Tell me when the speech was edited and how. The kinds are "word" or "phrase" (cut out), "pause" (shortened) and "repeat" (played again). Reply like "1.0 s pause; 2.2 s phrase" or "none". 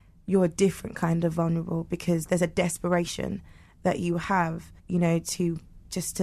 4.8 s pause